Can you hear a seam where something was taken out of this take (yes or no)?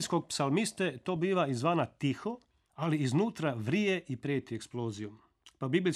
no